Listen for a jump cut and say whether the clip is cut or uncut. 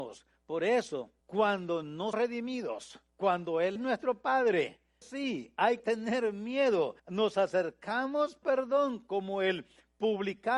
cut